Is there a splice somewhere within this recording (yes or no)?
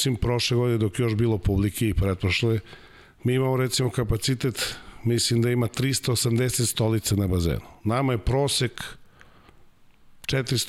no